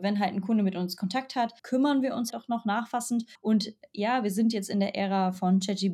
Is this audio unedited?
no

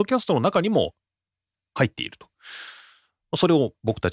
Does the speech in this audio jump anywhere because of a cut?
no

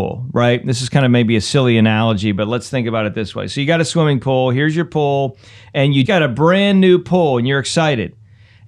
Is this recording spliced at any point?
yes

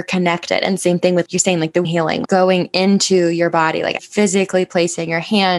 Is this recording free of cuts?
no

